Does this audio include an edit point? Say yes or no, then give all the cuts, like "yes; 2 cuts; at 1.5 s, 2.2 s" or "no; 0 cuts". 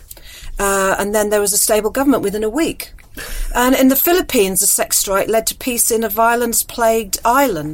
no; 0 cuts